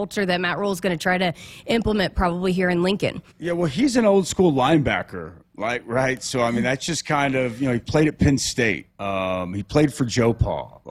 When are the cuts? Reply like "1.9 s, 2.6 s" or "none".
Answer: 3.3 s, 8.9 s